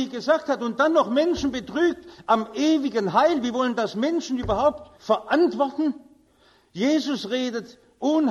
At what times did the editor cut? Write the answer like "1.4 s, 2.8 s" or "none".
4.9 s